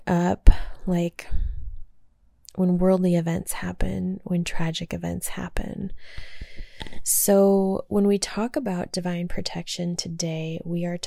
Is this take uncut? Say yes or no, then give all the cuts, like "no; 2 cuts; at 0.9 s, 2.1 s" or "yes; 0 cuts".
yes; 0 cuts